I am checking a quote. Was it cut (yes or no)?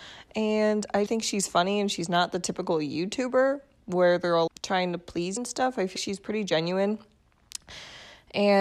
yes